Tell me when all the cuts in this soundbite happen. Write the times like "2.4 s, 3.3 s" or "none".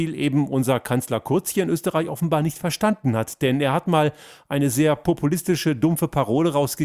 none